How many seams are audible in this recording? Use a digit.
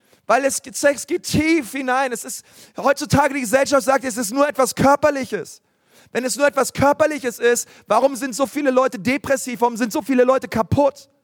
0